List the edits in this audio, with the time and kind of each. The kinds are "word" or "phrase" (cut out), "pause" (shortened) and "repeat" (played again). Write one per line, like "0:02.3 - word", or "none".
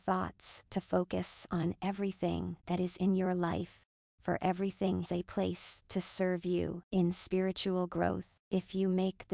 0:05.1 - word